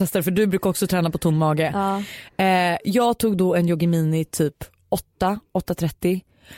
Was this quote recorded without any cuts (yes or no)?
yes